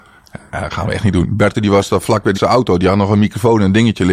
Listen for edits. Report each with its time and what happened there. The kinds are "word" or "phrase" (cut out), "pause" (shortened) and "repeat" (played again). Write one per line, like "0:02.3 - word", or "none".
0:01.5 - word
0:02.3 - word

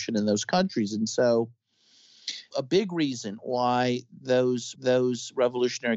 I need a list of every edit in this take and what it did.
0:02.5 - phrase
0:04.7 - repeat

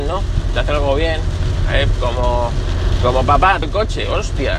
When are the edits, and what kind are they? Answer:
0:03.6 - word

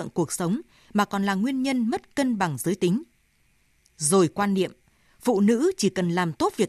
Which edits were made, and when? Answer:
none

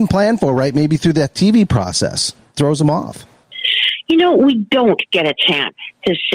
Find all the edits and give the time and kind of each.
none

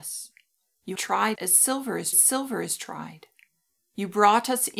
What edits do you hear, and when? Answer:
0:00.9 - word
0:01.3 - word
0:02.1 - repeat

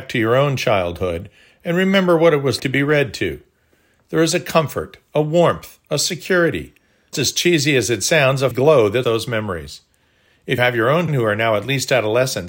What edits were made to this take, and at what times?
0:02.6 - word
0:07.1 - word
0:08.5 - word
0:09.0 - word
0:10.6 - word
0:11.1 - word

